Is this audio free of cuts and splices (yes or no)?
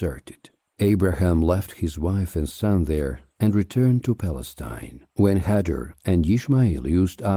yes